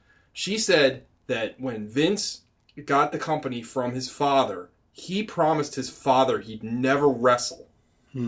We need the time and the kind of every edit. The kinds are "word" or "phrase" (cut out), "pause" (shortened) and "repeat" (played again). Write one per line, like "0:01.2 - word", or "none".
none